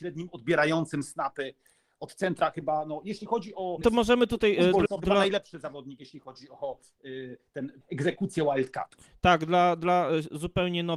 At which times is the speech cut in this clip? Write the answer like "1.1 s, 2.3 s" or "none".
3.8 s, 4.9 s, 7.8 s